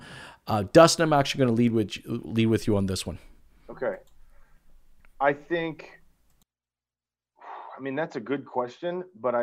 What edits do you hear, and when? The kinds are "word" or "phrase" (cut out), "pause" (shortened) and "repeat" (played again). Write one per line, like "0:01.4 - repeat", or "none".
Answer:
none